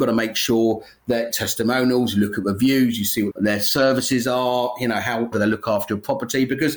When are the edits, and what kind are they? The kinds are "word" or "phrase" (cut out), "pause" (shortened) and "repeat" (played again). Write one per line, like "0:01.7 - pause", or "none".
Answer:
0:01.3 - phrase
0:03.3 - word
0:05.3 - word